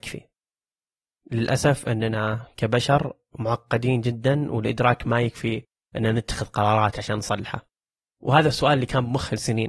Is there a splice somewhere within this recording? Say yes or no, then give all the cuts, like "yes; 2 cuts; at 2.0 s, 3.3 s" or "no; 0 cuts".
no; 0 cuts